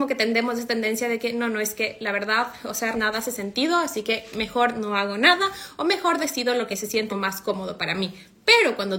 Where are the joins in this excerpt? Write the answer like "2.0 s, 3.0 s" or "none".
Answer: 2.9 s, 7.1 s